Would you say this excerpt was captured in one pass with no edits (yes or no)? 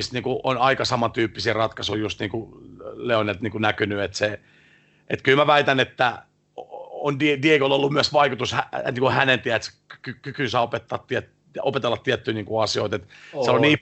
yes